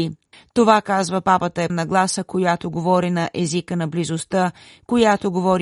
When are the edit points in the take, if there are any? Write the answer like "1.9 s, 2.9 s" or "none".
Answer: 1.7 s